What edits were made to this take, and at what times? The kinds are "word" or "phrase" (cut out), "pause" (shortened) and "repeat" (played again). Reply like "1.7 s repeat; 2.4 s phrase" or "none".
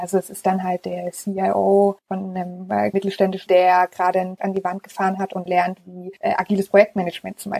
2.0 s pause; 2.9 s word; 3.5 s word; 4.4 s word; 5.5 s word; 6.2 s pause